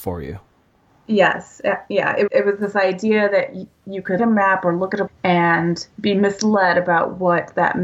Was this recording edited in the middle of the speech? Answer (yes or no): yes